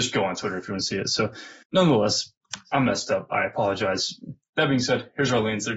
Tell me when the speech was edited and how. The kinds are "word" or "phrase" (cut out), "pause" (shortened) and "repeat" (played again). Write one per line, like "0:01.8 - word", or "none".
0:01.6 - pause